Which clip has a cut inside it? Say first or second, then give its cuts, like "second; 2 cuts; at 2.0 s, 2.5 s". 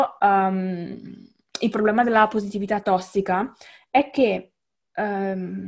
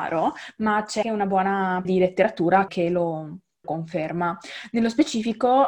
second; 4 cuts; at 1.0 s, 1.8 s, 2.7 s, 3.6 s